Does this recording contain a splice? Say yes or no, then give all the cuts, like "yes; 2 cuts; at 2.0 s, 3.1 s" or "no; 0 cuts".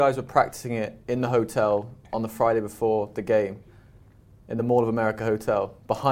no; 0 cuts